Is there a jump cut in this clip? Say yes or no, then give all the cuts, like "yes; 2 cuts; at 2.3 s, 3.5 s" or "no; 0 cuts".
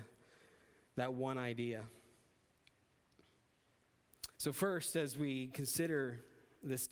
yes; 1 cut; at 4.3 s